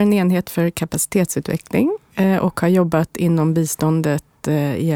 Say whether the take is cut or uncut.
uncut